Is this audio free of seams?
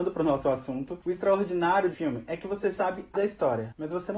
no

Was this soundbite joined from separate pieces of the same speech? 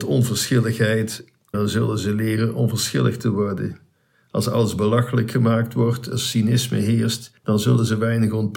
yes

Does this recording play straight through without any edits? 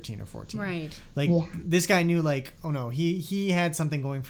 yes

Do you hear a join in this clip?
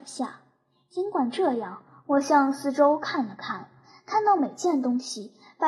no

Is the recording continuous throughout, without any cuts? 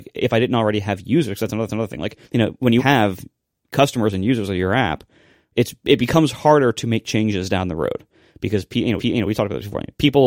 no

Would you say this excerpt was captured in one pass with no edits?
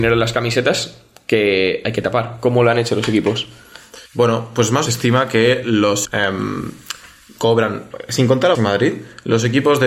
no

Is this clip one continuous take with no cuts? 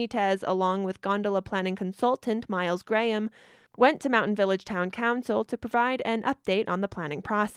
yes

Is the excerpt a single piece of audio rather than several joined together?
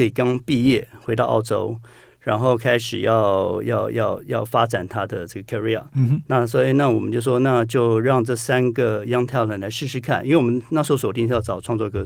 yes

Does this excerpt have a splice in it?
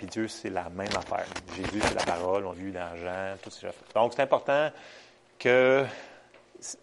yes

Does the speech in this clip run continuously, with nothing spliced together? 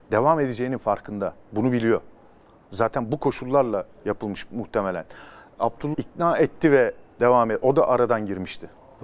no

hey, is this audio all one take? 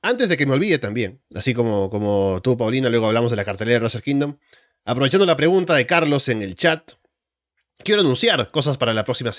no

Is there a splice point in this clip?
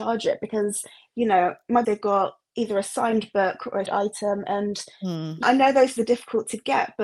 yes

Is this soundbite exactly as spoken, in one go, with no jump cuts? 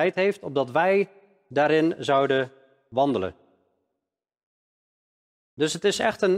yes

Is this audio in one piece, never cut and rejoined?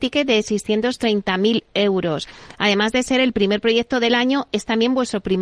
yes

